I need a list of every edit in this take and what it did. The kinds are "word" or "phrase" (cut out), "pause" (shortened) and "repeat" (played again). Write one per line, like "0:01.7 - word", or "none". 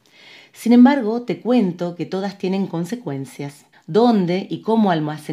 0:03.7 - pause